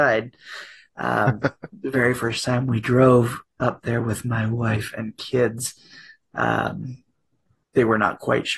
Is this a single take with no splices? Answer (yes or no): yes